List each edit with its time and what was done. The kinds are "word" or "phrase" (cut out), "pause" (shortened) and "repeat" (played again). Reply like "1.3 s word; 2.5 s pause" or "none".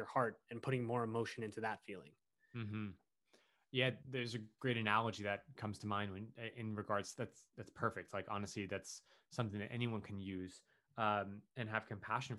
7.1 s phrase